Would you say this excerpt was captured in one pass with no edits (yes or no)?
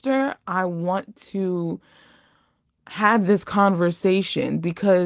yes